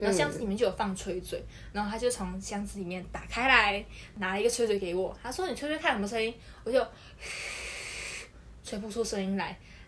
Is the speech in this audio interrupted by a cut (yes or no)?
no